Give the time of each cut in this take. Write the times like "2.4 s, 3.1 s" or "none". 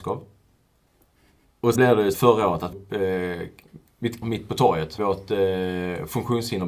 1.8 s, 2.1 s, 2.7 s, 4.2 s, 5.0 s